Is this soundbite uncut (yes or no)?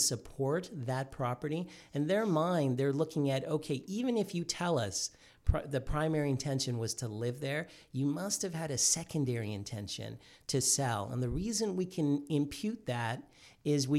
yes